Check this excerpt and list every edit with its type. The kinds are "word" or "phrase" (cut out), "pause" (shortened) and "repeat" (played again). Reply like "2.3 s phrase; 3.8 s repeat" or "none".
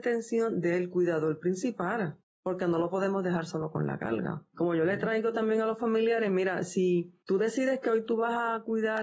2.2 s pause